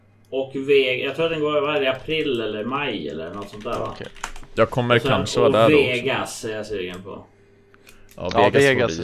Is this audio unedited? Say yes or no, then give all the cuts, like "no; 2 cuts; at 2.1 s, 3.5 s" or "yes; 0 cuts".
yes; 0 cuts